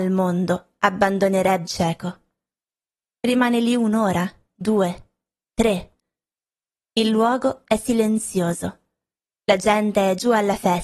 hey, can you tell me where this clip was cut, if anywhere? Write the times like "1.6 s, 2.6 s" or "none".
1.7 s